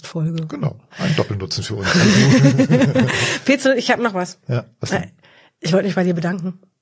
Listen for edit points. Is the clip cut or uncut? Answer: uncut